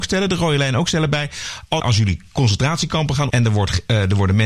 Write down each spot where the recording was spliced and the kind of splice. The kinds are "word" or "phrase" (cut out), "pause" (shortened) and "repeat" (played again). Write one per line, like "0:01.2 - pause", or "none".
0:01.8 - word
0:03.3 - word